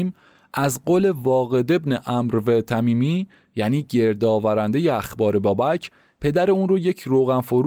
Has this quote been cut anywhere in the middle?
no; 0 cuts

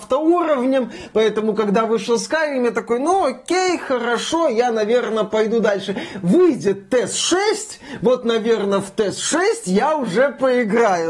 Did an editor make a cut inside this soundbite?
no; 0 cuts

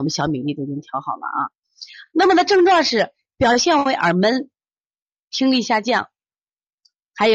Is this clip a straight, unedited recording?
yes; 0 cuts

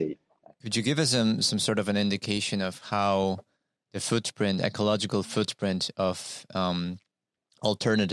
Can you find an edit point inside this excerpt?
no; 0 cuts

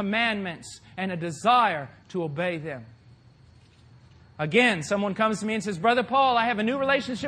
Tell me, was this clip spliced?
no; 0 cuts

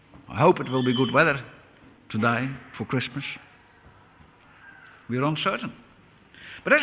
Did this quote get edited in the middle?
yes; 1 cut; at 2.7 s

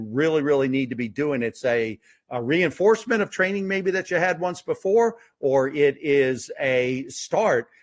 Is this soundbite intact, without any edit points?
yes; 0 cuts

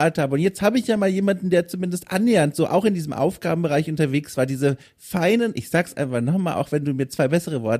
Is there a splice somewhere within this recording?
no; 0 cuts

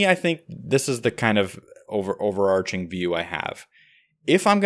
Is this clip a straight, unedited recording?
yes; 0 cuts

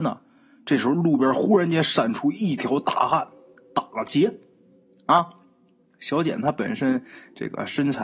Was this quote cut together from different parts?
no; 0 cuts

